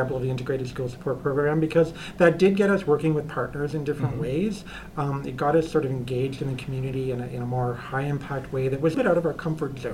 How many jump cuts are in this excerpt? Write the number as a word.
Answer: one